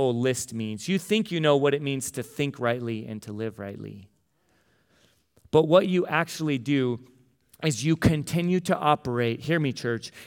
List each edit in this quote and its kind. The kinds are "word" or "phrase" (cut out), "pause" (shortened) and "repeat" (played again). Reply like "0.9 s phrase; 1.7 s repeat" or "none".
none